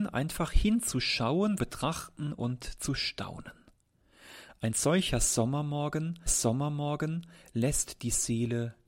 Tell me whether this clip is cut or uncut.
cut